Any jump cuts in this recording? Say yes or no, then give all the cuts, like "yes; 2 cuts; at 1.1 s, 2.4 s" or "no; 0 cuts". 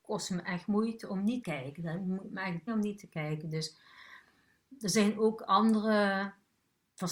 yes; 2 cuts; at 1.4 s, 2.7 s